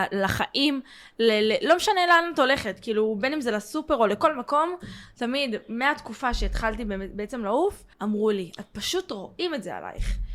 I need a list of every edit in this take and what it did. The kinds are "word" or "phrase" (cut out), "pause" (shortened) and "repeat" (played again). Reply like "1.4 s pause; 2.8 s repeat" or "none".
7.9 s pause